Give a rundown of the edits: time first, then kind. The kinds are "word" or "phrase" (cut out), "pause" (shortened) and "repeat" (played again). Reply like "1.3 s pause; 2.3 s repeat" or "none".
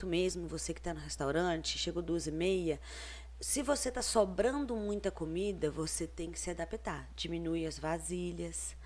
none